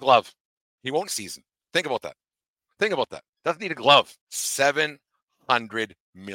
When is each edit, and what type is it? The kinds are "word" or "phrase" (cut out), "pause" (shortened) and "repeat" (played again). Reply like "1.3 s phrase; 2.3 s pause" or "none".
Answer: 1.1 s phrase; 4.2 s pause